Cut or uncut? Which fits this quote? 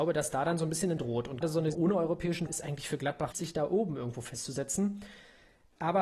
cut